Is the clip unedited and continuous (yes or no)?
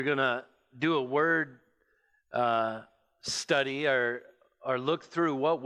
yes